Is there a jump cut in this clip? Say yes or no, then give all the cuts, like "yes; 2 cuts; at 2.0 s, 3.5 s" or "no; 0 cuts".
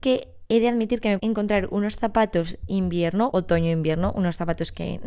yes; 3 cuts; at 1.2 s, 2.7 s, 3.3 s